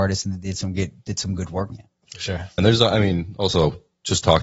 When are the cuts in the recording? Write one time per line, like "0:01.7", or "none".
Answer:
0:01.7
0:02.6